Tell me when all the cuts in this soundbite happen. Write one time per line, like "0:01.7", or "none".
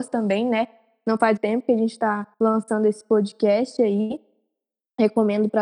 0:01.4
0:02.3